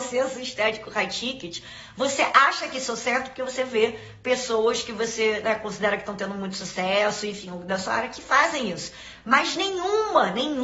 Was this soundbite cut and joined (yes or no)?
no